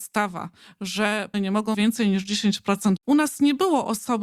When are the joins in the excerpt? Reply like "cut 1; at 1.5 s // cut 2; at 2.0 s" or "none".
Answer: cut 1; at 1.3 s // cut 2; at 1.7 s // cut 3; at 3.0 s